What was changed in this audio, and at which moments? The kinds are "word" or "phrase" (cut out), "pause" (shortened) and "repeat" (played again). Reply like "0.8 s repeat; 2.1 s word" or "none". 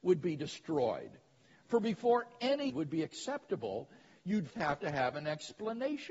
2.7 s word; 4.5 s word